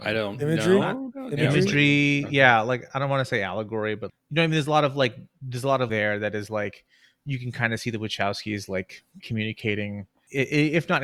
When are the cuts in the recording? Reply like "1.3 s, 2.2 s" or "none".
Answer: 4.1 s, 5.9 s, 9.2 s